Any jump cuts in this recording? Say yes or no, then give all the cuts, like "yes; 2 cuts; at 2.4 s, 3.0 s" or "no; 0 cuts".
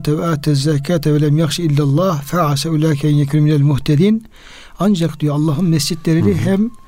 no; 0 cuts